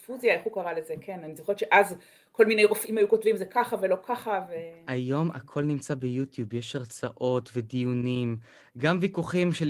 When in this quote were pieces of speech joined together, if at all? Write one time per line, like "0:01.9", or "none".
none